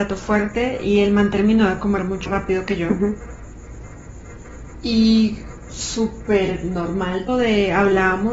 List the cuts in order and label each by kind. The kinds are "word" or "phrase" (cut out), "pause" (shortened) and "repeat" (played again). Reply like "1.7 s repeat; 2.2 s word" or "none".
2.3 s word; 5.7 s word; 7.3 s word